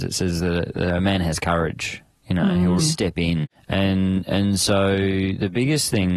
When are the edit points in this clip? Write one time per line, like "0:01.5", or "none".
0:02.8